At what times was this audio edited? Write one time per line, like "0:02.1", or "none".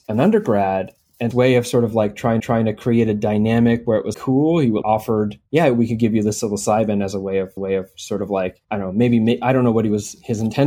0:01.3
0:02.4
0:04.1
0:04.8
0:05.5
0:07.6
0:08.6